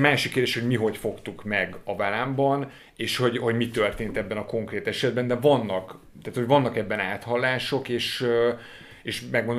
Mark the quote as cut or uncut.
uncut